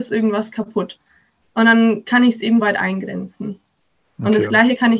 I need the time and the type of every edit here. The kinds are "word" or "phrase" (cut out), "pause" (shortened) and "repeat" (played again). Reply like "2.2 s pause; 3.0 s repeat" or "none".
2.6 s word

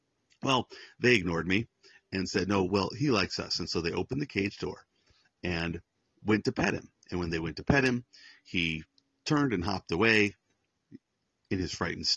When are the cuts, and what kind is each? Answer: none

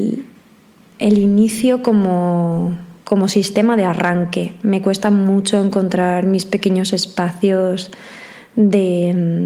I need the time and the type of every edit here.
none

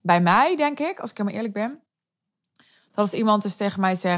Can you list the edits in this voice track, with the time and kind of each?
none

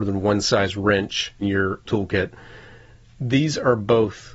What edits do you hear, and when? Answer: 1.4 s word; 1.8 s word

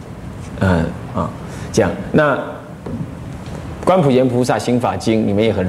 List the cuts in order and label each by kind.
1.1 s phrase

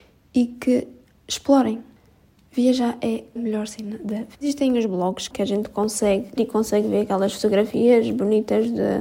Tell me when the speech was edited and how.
3.4 s word; 4.4 s pause; 5.3 s word; 6.4 s word

